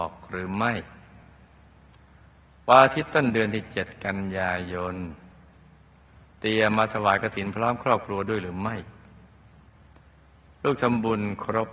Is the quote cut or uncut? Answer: uncut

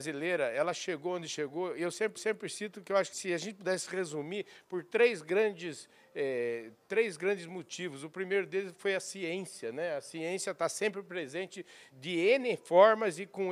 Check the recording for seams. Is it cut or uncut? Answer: cut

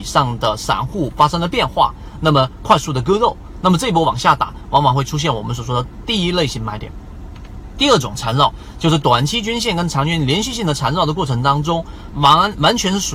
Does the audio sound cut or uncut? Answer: cut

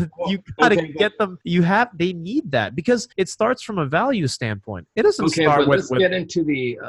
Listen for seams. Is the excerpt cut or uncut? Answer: cut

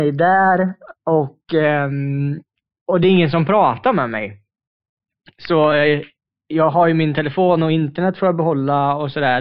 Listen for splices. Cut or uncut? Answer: uncut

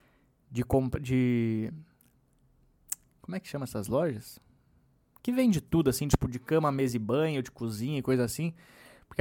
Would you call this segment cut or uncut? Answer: uncut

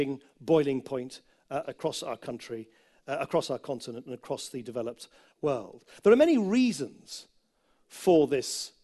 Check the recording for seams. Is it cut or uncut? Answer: cut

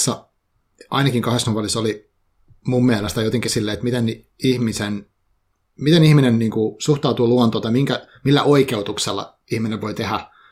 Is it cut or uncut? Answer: uncut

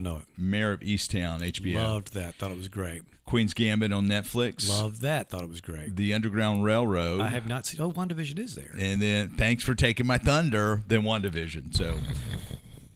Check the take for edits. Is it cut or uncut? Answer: uncut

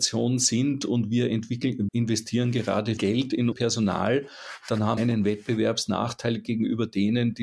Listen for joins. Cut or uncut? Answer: cut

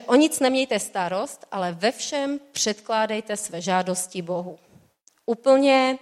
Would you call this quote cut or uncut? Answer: uncut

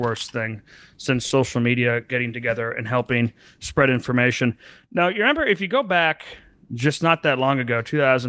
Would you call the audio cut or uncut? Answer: uncut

